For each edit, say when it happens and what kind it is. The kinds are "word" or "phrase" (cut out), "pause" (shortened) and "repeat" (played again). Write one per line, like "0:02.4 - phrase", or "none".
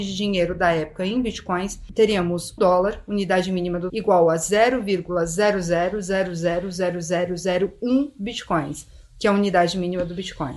0:02.6 - word
0:03.9 - word